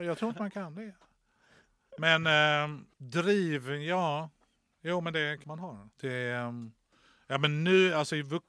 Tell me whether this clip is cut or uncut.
cut